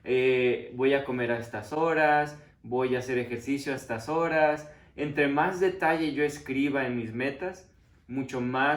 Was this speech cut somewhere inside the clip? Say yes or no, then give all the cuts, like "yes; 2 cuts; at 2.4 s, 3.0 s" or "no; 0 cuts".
no; 0 cuts